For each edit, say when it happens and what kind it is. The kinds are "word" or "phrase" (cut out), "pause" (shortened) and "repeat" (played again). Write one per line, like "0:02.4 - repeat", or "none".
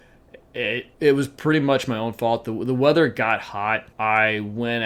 0:00.9 - pause
0:03.9 - pause

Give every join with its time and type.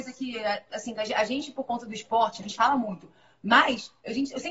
0:02.4 - word

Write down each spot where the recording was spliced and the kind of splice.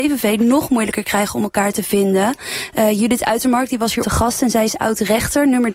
0:04.0 - word

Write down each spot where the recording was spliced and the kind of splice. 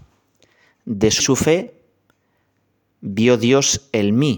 0:01.2 - phrase

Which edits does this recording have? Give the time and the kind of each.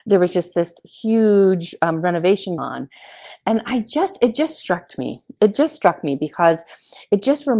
0:02.6 - word

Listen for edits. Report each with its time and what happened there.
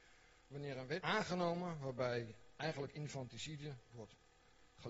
0:01.0 - word

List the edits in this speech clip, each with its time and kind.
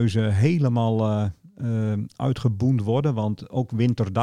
none

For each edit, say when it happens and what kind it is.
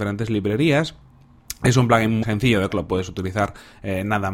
0:02.2 - word
0:02.7 - word

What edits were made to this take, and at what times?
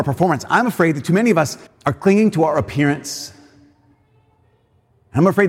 0:01.7 - pause

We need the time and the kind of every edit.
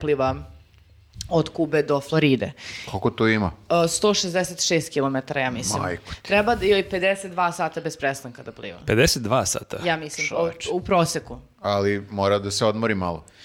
none

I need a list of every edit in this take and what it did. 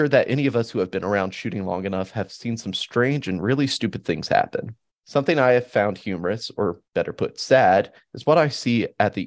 0:04.9 - pause
0:06.9 - pause

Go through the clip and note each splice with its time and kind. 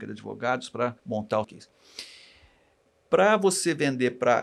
0:01.0 - pause
0:01.4 - word

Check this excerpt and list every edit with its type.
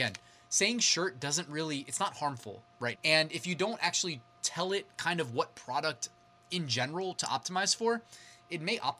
0:03.0 - word

